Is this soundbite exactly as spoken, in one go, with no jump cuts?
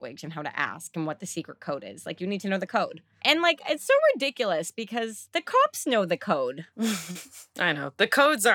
no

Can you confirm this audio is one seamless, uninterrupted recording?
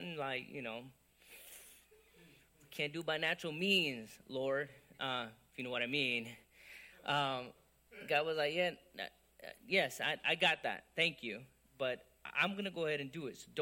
yes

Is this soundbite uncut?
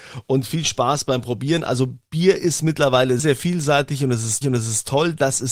no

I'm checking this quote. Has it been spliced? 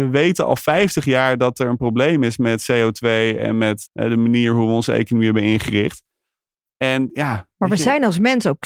yes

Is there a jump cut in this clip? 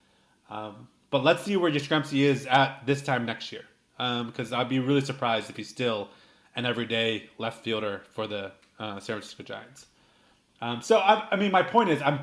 no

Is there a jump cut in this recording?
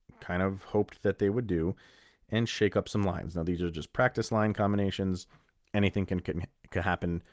no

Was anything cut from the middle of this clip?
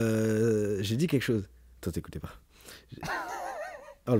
no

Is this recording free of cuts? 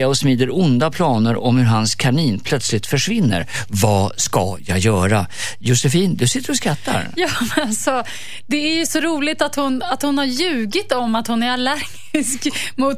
yes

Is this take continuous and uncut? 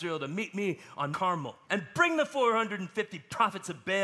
no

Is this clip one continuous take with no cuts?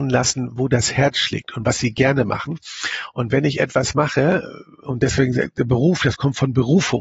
yes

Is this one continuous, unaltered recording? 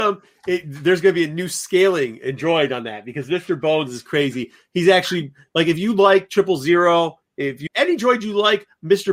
no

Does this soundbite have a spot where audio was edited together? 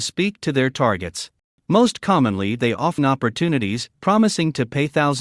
yes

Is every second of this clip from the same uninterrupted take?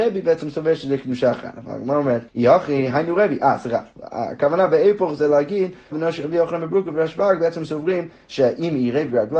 no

